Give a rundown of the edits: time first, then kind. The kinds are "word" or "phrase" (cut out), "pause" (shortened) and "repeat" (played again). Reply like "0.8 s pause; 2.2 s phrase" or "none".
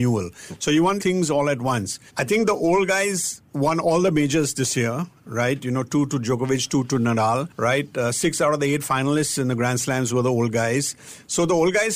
1.0 s phrase; 2.1 s pause